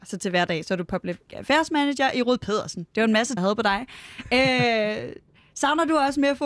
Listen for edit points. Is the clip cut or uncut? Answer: cut